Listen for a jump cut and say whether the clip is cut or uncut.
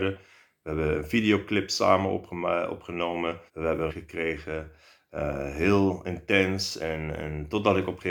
cut